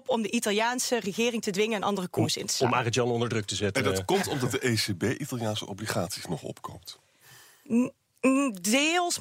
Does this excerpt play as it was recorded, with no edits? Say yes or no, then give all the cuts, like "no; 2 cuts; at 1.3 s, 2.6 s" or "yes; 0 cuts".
yes; 0 cuts